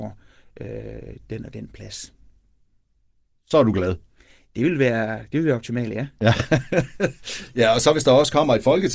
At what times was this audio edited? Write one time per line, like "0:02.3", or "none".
none